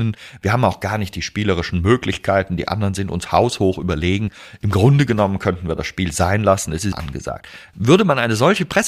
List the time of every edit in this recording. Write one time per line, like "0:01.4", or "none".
0:06.9